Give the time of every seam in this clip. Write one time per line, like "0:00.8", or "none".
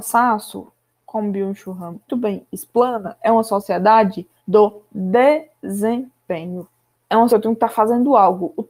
0:02.1
0:04.4
0:06.9
0:07.3